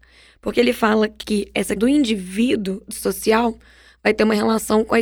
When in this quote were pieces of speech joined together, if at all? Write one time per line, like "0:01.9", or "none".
0:01.2
0:01.8
0:02.9